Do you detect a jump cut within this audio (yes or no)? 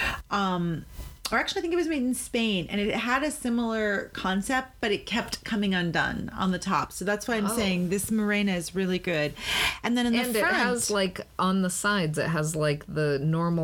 no